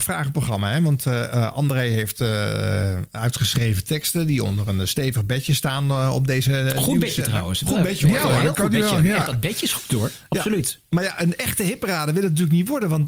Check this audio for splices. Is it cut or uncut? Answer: uncut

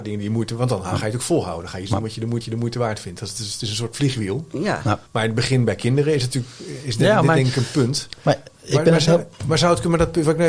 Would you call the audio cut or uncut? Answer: cut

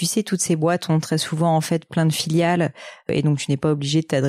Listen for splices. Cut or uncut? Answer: uncut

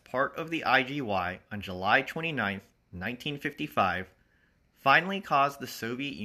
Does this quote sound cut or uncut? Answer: uncut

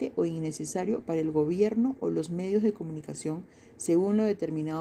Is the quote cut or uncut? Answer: uncut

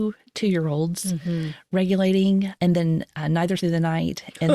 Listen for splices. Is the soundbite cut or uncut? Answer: cut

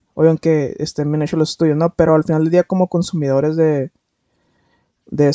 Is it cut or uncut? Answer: uncut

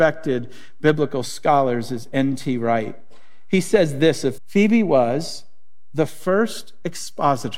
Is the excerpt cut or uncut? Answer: cut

